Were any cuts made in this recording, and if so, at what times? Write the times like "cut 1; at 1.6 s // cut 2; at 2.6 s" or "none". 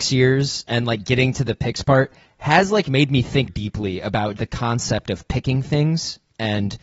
cut 1; at 3.5 s // cut 2; at 4.4 s